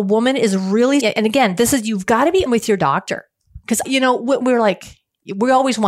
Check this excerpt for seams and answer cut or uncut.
cut